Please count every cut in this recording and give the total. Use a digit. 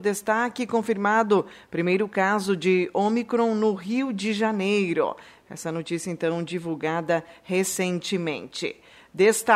0